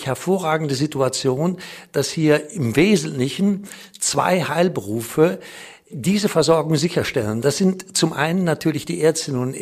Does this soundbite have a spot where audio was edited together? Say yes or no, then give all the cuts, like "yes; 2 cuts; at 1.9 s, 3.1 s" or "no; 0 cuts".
no; 0 cuts